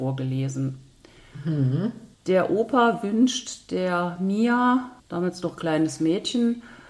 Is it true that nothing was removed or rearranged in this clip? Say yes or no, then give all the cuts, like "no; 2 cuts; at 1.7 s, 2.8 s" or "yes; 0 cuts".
no; 2 cuts; at 2.1 s, 5.0 s